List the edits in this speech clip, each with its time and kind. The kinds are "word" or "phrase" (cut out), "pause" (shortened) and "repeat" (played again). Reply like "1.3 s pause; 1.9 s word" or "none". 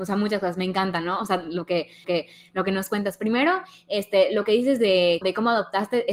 2.0 s repeat; 5.2 s word